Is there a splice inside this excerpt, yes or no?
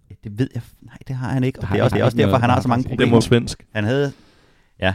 yes